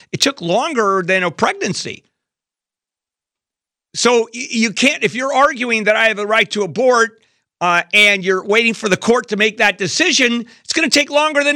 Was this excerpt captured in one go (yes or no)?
yes